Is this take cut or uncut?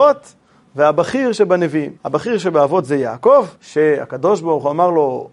cut